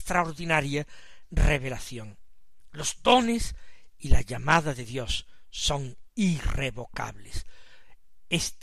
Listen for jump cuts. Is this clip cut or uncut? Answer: uncut